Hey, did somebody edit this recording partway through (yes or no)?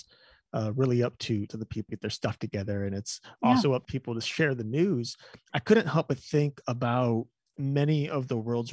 yes